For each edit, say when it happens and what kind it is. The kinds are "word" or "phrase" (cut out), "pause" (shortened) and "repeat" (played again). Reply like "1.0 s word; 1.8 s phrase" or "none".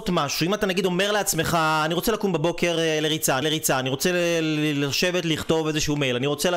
3.4 s repeat